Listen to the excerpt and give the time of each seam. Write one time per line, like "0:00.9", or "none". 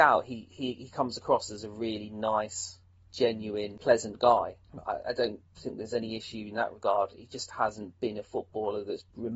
none